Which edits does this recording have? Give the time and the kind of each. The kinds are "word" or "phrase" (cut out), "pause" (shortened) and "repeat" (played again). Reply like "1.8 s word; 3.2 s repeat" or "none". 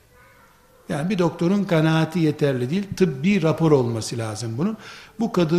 none